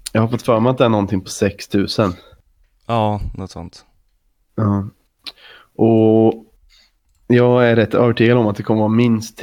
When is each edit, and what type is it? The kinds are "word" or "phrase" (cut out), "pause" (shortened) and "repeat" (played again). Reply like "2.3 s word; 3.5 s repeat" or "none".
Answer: none